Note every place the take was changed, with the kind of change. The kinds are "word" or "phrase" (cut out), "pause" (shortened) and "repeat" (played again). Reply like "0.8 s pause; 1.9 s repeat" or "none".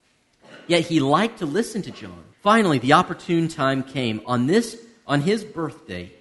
2.3 s pause